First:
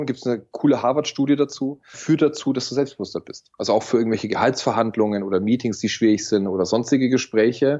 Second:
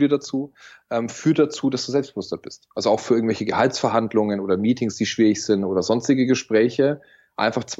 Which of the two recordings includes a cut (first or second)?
first